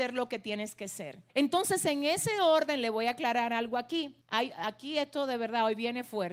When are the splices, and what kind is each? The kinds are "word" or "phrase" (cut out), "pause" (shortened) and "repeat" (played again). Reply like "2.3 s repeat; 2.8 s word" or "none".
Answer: 1.3 s pause; 4.2 s pause